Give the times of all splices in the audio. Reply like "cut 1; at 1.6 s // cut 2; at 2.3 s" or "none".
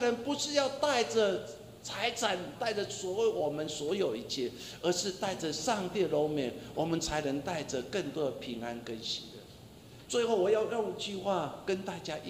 cut 1; at 2.6 s